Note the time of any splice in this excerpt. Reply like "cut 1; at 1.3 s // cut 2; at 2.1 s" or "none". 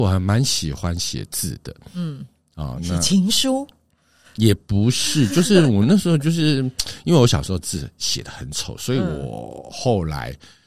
none